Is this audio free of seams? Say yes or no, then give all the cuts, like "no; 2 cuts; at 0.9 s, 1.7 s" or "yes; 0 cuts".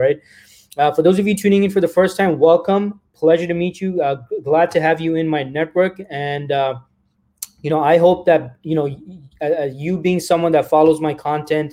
yes; 0 cuts